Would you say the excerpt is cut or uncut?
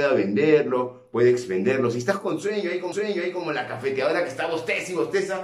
cut